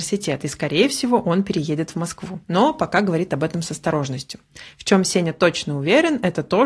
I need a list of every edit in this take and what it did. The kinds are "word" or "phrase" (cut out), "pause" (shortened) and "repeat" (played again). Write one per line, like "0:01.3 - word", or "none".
none